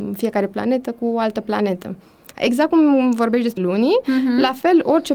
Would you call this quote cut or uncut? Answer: cut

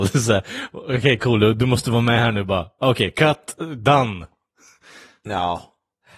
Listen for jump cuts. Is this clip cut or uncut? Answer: uncut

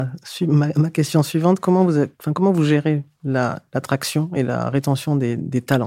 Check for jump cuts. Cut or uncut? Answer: uncut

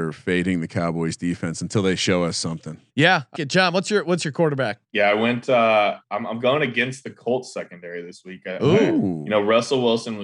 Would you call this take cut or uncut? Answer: cut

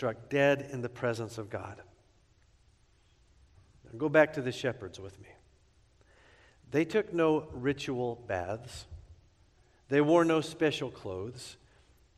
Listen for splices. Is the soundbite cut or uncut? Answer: uncut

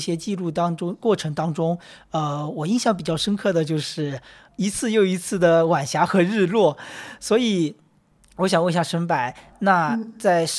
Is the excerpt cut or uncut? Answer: uncut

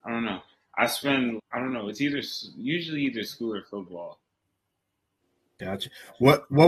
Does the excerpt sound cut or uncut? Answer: cut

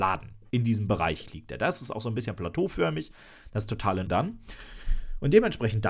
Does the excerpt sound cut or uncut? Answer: cut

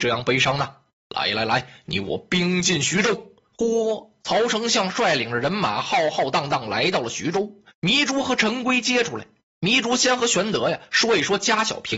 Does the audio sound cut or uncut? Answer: uncut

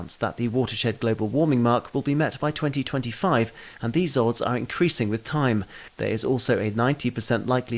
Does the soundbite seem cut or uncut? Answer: uncut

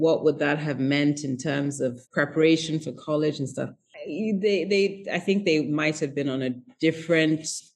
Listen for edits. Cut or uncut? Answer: cut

